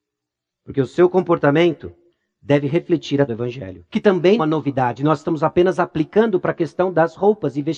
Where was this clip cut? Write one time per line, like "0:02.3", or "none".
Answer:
0:02.1
0:03.3
0:03.9
0:04.4